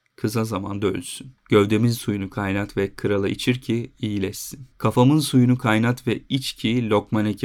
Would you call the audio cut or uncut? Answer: cut